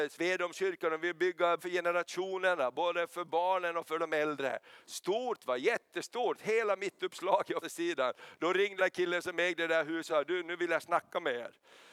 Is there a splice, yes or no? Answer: yes